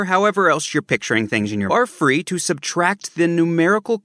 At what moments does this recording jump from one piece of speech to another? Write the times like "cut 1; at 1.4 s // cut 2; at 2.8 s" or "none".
cut 1; at 1.7 s

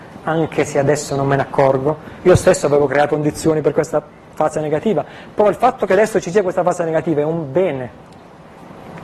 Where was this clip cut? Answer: cut 1; at 3.1 s

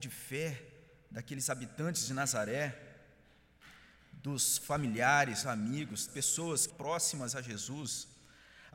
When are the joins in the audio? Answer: cut 1; at 5.4 s // cut 2; at 6.1 s // cut 3; at 6.7 s

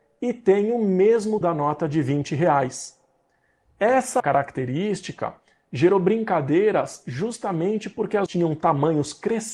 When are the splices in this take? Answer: cut 1; at 1.4 s // cut 2; at 4.2 s // cut 3; at 8.3 s

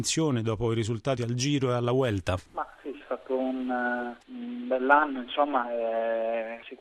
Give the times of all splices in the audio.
cut 1; at 1.2 s // cut 2; at 3.0 s

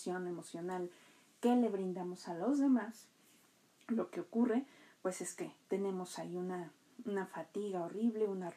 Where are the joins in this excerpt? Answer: none

